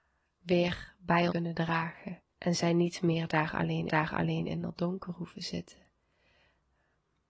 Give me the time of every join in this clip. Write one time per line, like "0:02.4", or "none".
0:01.3
0:02.3
0:03.9